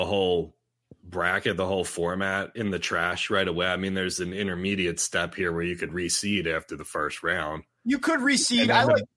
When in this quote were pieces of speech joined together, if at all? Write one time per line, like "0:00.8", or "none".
none